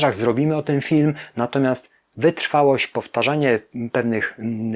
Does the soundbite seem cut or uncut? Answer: uncut